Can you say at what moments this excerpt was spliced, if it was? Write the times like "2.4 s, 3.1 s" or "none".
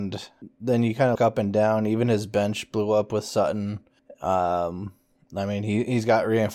1.2 s